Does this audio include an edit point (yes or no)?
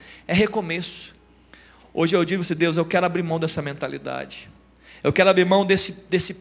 no